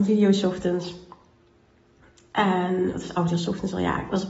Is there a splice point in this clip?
no; 0 cuts

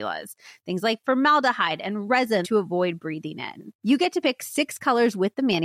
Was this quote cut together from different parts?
yes; 2 cuts; at 2.4 s, 3.7 s

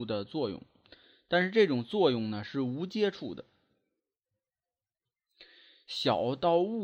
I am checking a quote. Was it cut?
no; 0 cuts

